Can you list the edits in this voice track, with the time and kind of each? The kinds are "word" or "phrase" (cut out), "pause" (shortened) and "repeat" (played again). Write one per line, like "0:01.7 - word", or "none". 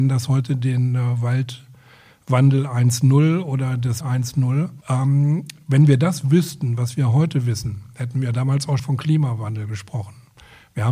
0:04.0 - word
0:04.8 - pause
0:08.8 - word